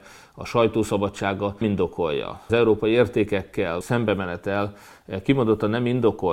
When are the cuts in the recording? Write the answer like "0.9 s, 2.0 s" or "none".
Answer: 1.6 s, 2.5 s, 3.8 s

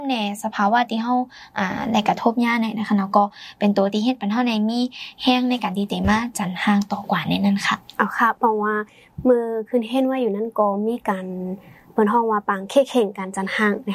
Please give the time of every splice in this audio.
none

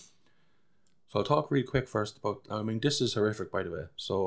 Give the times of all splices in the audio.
none

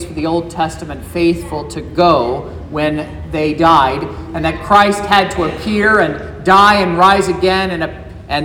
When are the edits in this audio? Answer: none

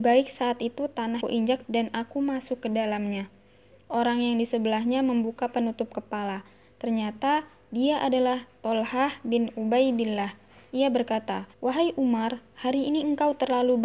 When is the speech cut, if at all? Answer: 1.2 s, 1.6 s, 11.5 s

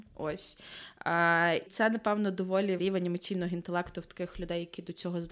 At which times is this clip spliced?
1.7 s, 2.8 s

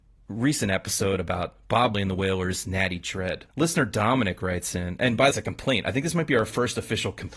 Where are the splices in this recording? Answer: 1.9 s, 3.5 s, 5.3 s

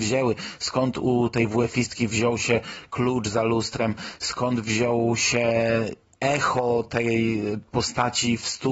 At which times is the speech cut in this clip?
none

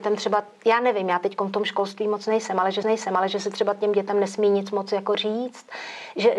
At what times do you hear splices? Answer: 2.8 s

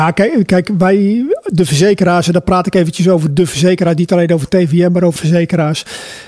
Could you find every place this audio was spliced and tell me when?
5.2 s

